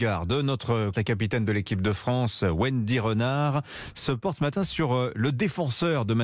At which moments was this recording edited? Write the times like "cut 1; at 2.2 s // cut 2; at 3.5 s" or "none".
cut 1; at 0.9 s